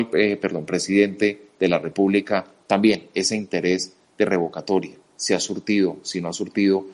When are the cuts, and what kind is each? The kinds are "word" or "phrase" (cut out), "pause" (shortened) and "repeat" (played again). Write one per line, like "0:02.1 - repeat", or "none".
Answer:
none